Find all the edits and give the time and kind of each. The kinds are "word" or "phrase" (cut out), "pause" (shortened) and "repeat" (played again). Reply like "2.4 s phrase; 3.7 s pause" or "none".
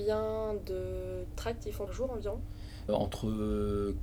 1.9 s word; 2.9 s word